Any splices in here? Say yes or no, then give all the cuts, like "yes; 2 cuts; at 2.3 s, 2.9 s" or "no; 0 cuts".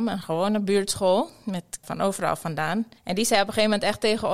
yes; 2 cuts; at 1.8 s, 3.0 s